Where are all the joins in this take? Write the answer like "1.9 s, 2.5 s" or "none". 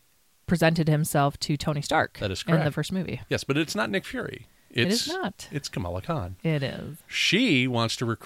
2.7 s, 7.0 s